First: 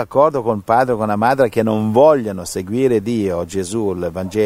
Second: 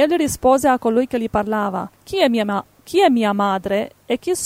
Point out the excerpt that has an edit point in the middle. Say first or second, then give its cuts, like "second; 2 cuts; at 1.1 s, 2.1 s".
second; 1 cut; at 1.9 s